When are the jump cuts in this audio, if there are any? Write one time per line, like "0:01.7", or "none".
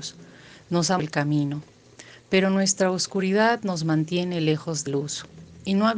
0:01.0
0:04.9